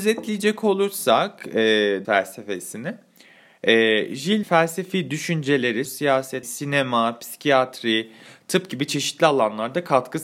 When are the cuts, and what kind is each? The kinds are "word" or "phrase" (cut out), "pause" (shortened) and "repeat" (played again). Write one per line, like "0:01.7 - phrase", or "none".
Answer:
0:02.0 - word
0:04.4 - word
0:05.8 - word
0:06.4 - word